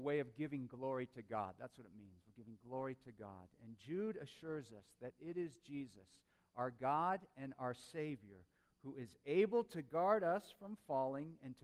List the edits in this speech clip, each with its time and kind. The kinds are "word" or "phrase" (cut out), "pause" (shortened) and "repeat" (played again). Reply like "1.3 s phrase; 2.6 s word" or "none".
none